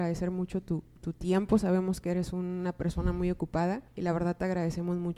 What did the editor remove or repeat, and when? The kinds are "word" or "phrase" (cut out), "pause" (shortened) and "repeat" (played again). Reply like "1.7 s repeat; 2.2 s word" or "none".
3.9 s pause